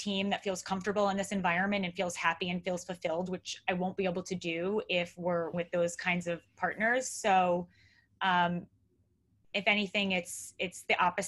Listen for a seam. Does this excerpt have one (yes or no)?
yes